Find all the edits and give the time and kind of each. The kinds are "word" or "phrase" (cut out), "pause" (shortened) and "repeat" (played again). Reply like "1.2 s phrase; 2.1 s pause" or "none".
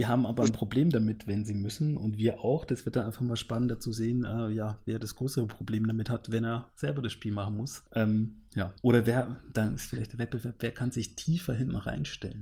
7.9 s pause; 8.8 s pause